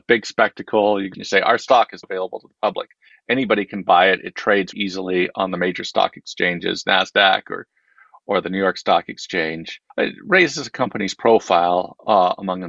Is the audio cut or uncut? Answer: cut